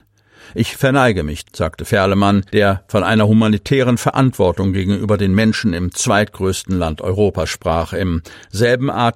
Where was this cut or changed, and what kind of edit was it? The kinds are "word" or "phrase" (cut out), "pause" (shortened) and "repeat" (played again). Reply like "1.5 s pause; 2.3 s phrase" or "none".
1.4 s word; 2.5 s pause